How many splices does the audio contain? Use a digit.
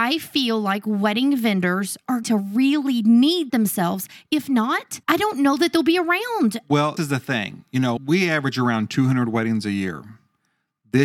5